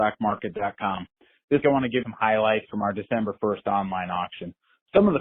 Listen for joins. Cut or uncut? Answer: cut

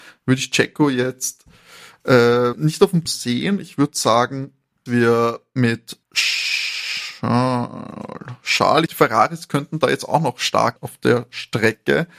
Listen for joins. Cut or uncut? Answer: cut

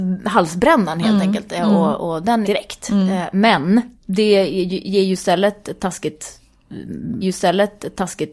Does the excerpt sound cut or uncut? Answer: cut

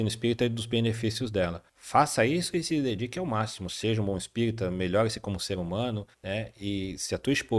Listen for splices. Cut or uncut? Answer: cut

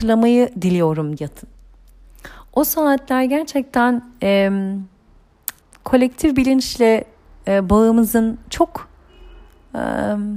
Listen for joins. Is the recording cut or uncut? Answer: cut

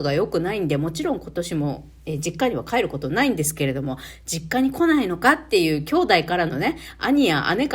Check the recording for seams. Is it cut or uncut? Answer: uncut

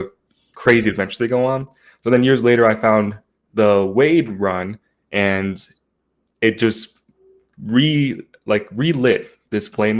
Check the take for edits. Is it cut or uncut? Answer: uncut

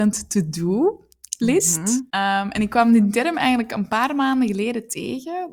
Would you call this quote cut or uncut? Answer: cut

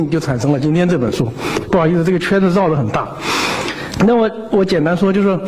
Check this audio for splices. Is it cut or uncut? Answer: cut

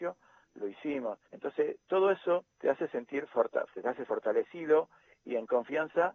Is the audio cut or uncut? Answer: cut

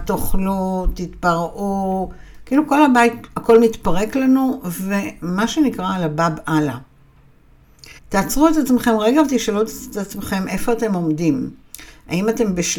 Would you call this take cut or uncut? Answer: cut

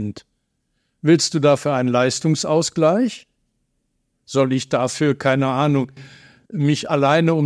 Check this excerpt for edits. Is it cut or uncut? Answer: uncut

